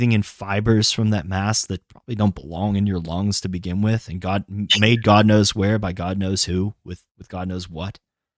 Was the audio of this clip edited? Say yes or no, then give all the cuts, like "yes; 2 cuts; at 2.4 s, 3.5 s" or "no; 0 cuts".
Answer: yes; 1 cut; at 7.1 s